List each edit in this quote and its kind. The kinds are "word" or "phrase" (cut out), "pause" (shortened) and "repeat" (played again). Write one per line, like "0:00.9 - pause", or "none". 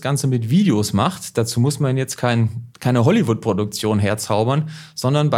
0:02.7 - pause